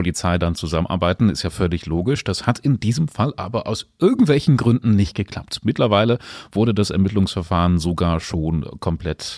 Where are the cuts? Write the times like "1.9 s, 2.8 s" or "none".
none